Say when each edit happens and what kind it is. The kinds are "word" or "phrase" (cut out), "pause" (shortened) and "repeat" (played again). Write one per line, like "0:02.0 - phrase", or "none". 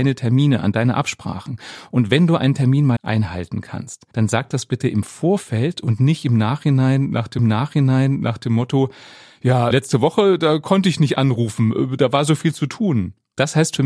0:03.0 - word
0:04.1 - pause
0:07.4 - repeat
0:09.7 - word